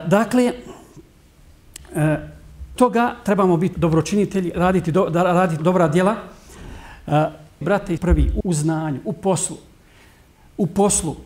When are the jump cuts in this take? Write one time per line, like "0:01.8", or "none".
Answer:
0:02.8
0:03.7
0:04.5
0:05.6
0:07.6
0:08.0
0:08.4